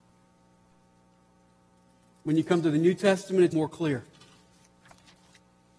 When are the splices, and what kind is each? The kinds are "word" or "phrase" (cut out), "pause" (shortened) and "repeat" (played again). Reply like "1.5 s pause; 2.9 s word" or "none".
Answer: 3.5 s word